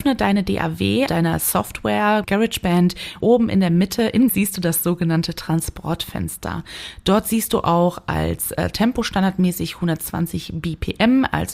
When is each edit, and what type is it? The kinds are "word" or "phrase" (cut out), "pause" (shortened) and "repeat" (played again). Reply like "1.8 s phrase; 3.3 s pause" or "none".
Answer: 1.1 s word; 2.2 s word; 3.2 s word; 4.3 s word